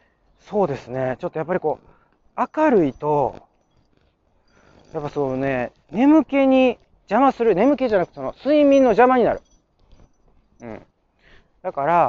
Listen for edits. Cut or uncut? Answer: uncut